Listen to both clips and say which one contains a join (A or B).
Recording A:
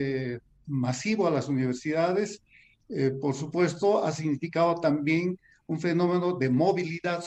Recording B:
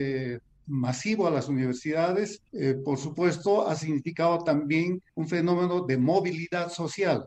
B